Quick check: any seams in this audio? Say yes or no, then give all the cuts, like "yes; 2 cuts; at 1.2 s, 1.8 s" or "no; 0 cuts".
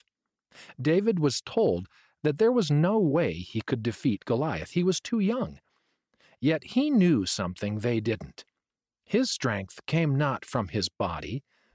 no; 0 cuts